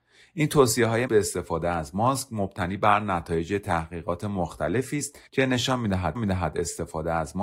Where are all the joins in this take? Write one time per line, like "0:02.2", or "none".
0:01.1
0:05.3
0:06.1